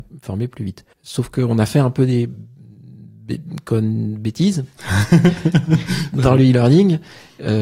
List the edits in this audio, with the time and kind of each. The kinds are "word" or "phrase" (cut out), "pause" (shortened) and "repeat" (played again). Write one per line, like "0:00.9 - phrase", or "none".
0:00.9 - pause